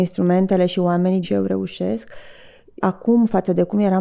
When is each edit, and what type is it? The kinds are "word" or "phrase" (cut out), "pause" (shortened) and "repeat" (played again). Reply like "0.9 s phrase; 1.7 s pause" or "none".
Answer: 1.2 s word; 2.8 s word